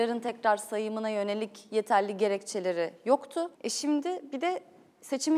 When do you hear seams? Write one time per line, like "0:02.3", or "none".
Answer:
0:03.5